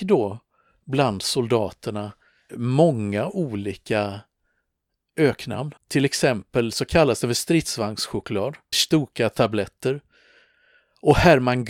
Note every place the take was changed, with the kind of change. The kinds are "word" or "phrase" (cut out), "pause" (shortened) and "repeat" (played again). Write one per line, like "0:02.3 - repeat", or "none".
0:02.5 - word
0:05.8 - pause
0:08.7 - word